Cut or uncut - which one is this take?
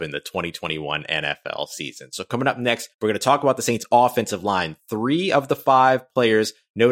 cut